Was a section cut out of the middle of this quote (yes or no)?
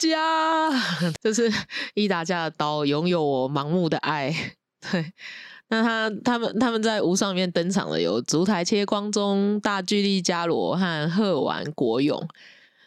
yes